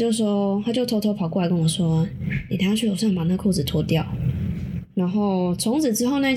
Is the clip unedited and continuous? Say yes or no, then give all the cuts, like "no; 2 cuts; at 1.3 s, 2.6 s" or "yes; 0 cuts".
yes; 0 cuts